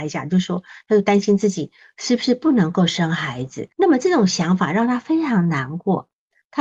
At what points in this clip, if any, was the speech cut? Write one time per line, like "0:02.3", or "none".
0:03.7